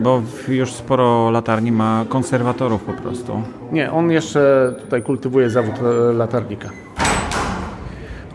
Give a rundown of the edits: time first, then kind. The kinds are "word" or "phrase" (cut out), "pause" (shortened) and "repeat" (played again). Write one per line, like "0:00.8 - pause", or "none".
none